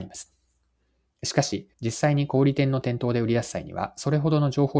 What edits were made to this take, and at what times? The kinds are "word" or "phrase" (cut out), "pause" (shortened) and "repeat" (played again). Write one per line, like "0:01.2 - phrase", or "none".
0:01.7 - pause